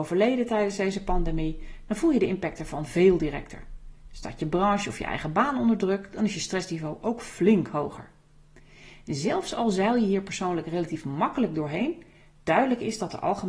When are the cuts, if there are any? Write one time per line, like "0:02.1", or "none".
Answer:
none